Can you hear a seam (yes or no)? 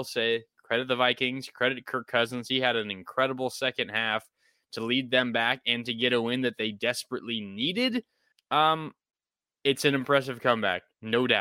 yes